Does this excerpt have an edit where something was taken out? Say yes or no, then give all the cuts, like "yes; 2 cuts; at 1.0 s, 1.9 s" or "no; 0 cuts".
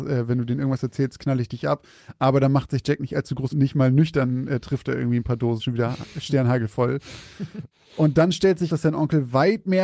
yes; 3 cuts; at 3.5 s, 5.6 s, 8.7 s